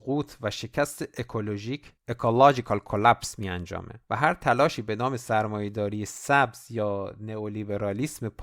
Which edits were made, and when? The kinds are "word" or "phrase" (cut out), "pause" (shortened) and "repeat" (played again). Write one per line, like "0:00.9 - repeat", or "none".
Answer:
0:02.0 - pause
0:04.0 - pause